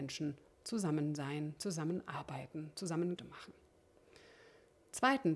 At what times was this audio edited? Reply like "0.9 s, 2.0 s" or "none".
3.2 s